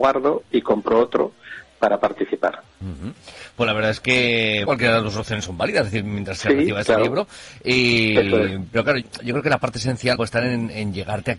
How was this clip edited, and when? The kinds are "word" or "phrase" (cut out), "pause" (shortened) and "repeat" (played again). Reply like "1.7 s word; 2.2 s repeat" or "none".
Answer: 4.7 s word; 6.4 s word; 9.0 s word; 10.2 s phrase